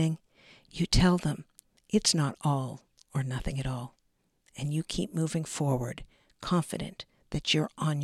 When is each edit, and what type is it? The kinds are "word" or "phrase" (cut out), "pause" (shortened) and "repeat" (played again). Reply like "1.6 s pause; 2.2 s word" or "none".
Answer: none